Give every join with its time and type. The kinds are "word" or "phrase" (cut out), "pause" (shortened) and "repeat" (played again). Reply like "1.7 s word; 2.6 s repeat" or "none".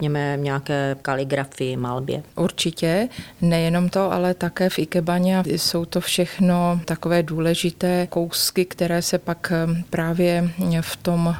5.4 s phrase